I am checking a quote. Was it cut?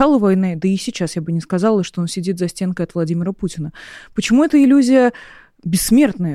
no; 0 cuts

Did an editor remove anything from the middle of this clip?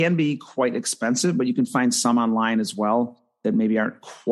no; 0 cuts

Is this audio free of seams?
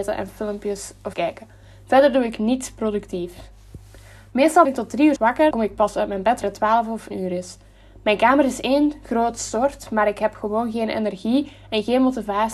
no; 6 cuts; at 1.1 s, 4.6 s, 5.2 s, 5.5 s, 6.4 s, 7.1 s

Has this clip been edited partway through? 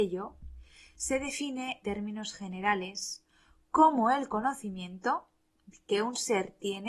yes; 1 cut; at 1.8 s

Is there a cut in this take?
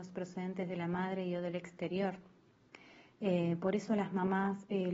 no; 0 cuts

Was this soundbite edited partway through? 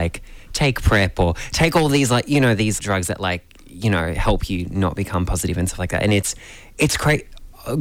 yes; 1 cut; at 2.8 s

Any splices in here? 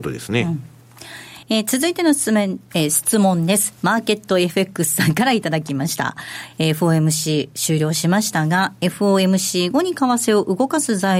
yes; 1 cut; at 1.4 s

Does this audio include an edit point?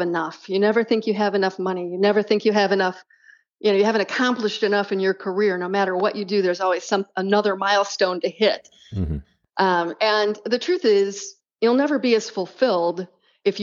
no; 0 cuts

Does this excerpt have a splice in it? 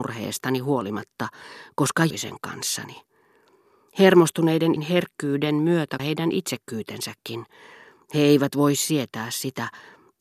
yes; 3 cuts; at 2.1 s, 4.8 s, 6.0 s

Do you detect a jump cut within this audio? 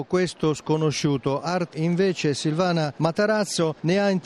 yes; 1 cut; at 1.7 s

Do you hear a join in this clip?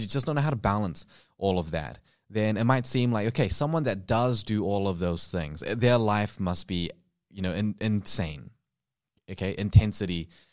no; 0 cuts

